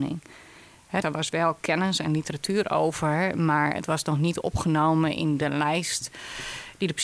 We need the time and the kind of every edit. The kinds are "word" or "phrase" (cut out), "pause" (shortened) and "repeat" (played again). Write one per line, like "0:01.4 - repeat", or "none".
0:01.0 - word